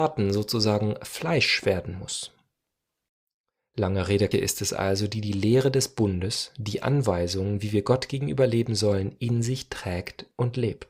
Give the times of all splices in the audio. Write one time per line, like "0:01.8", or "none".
0:04.3

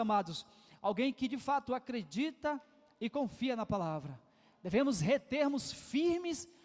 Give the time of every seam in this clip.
none

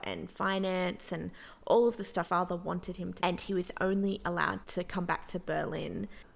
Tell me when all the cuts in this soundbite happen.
0:02.2
0:03.2
0:04.6

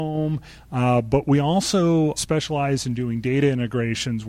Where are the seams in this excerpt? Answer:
0:02.2

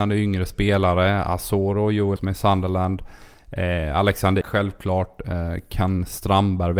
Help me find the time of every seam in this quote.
0:02.2
0:04.4

